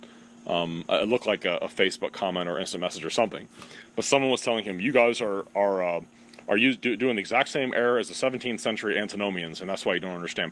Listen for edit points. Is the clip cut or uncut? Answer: uncut